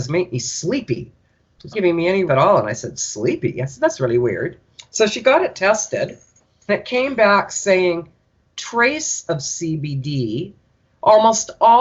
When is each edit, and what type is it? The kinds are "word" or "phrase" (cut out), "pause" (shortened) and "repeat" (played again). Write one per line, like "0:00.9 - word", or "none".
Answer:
0:01.7 - word
0:02.3 - word
0:06.7 - word
0:09.3 - word